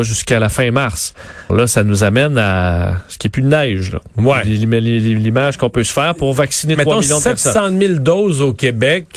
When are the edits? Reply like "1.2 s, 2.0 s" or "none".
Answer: 1.5 s

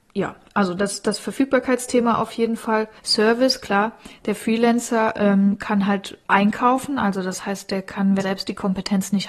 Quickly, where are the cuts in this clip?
3.0 s, 6.2 s, 8.2 s

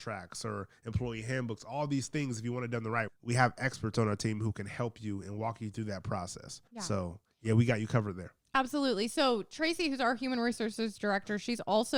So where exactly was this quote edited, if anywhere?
3.1 s, 6.7 s

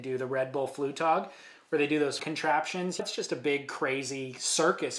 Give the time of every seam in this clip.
2.2 s, 3.0 s

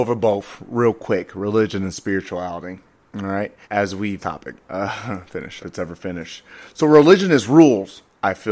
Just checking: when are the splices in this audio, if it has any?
3.6 s, 4.2 s, 4.6 s, 5.6 s

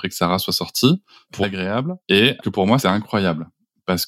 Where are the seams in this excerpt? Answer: 1.4 s, 2.0 s, 2.4 s, 2.8 s

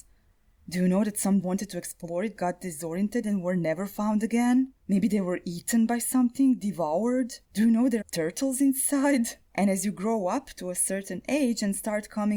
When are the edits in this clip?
1.4 s, 2.4 s, 3.2 s, 4.8 s, 7.4 s, 8.0 s, 9.5 s

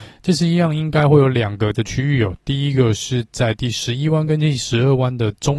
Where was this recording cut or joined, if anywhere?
1.7 s

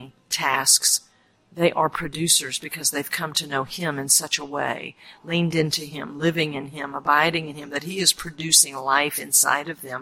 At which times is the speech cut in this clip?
none

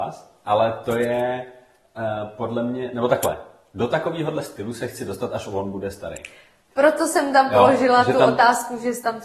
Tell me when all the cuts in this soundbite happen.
none

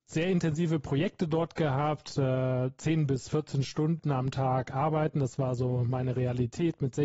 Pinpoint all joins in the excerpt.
none

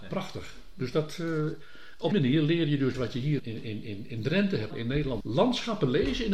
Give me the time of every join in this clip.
2.1 s, 2.9 s, 3.4 s, 4.7 s, 5.2 s

